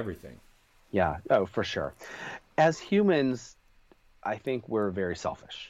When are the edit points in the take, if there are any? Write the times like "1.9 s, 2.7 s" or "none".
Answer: none

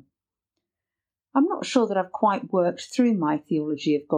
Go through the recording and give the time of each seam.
none

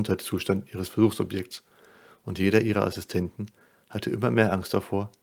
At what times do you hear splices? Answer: none

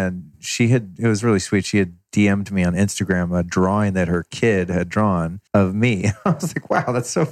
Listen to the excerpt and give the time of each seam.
5.5 s

